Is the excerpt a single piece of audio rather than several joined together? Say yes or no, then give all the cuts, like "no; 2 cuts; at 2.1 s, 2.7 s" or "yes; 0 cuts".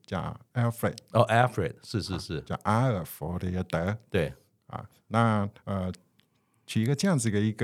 yes; 0 cuts